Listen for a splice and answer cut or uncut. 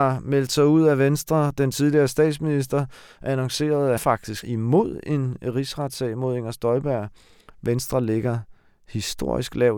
cut